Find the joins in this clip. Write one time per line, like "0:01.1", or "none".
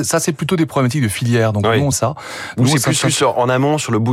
0:01.9
0:03.0